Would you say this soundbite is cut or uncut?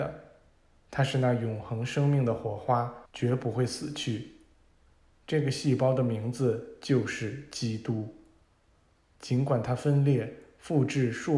cut